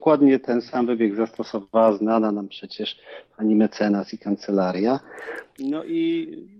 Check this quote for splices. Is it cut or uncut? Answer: uncut